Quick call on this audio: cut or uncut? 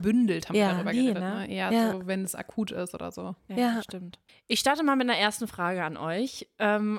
uncut